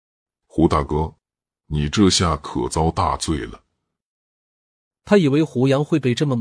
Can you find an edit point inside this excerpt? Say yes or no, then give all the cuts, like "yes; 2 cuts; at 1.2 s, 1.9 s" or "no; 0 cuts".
no; 0 cuts